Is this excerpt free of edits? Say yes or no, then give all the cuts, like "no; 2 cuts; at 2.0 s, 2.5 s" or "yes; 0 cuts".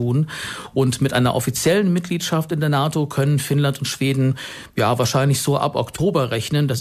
yes; 0 cuts